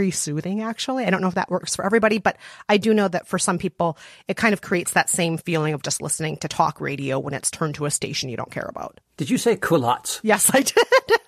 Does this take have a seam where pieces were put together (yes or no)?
no